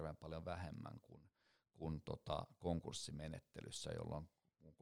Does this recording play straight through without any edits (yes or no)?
yes